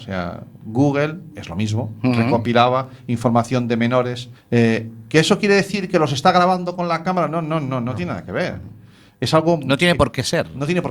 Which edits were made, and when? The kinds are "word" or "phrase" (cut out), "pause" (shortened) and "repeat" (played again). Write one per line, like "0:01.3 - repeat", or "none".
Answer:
0:01.3 - phrase
0:04.4 - pause